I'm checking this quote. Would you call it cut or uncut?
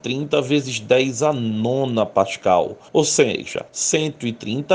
cut